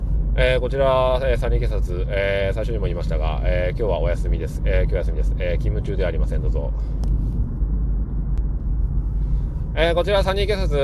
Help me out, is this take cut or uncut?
uncut